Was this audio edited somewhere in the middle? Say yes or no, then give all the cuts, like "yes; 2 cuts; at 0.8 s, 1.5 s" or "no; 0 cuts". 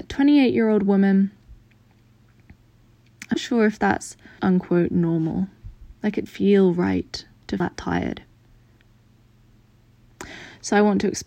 yes; 4 cuts; at 3.3 s, 4.4 s, 6.3 s, 7.6 s